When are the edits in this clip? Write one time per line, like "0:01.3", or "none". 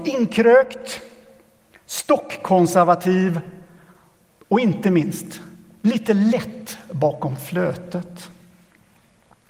none